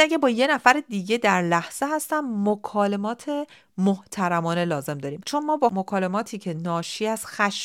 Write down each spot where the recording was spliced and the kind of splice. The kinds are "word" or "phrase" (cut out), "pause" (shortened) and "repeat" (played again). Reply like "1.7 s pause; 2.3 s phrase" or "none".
none

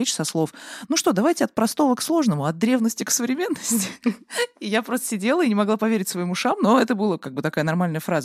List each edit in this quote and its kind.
none

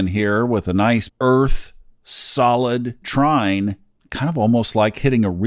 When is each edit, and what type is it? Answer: 1.1 s word; 3.0 s word

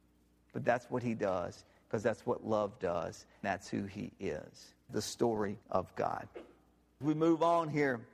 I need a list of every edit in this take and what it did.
3.4 s word; 4.9 s phrase; 5.6 s pause; 7.0 s word

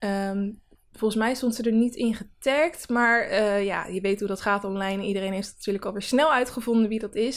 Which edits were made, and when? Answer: none

